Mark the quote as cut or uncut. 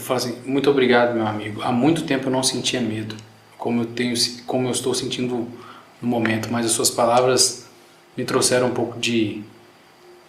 uncut